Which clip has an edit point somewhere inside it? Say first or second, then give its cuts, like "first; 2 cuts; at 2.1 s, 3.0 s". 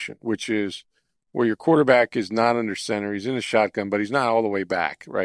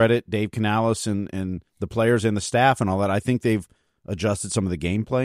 second; 1 cut; at 1.7 s